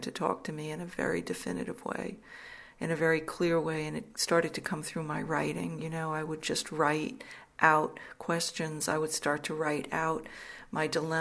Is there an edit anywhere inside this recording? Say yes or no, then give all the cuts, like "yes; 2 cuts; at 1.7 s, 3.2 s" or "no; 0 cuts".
no; 0 cuts